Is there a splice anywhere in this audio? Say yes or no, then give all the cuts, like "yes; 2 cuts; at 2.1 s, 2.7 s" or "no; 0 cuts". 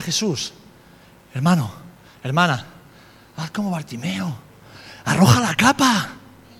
no; 0 cuts